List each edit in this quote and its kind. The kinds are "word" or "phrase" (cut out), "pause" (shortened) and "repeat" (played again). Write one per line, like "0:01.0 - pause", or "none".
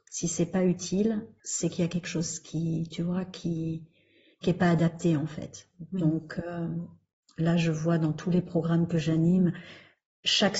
none

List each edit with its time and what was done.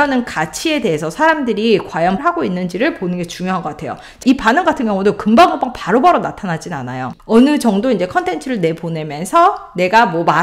0:02.2 - word
0:04.2 - word
0:07.2 - pause

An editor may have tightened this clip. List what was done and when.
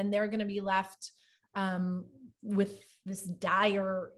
none

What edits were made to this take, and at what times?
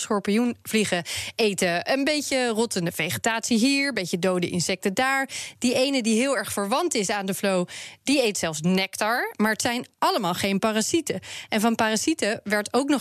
none

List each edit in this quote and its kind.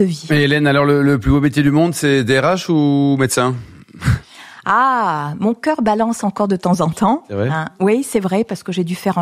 none

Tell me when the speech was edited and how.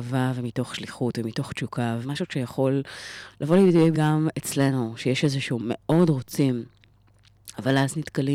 0:02.0 - word
0:03.9 - word
0:05.6 - phrase

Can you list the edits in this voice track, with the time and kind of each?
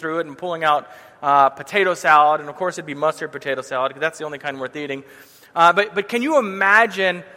none

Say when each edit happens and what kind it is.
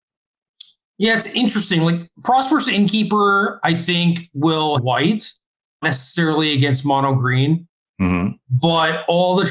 0:04.7 - phrase
0:05.8 - word

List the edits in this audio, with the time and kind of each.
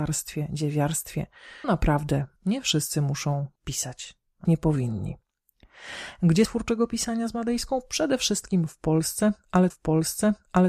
0:01.6 - word
0:02.4 - pause
0:03.6 - pause
0:04.4 - word
0:06.4 - word
0:09.7 - repeat

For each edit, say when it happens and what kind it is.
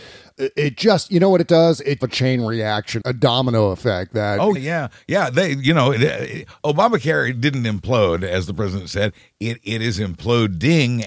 0:02.0 - phrase
0:03.0 - word
0:04.6 - word

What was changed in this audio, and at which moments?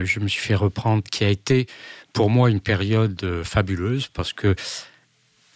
0:01.0 - phrase

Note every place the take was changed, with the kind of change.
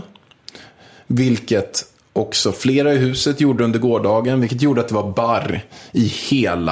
none

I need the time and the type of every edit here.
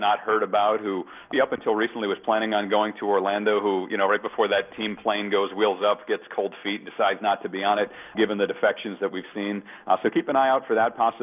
0:01.3 - word
0:08.1 - word

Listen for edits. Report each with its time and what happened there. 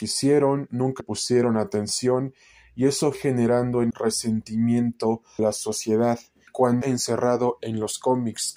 0:01.0 - word
0:03.1 - word
0:03.9 - word
0:05.4 - word
0:06.5 - word
0:06.8 - word

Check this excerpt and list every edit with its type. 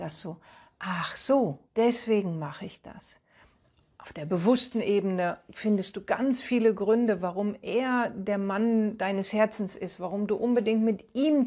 0:01.6 - pause

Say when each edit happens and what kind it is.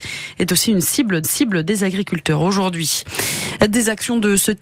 0:01.2 - repeat

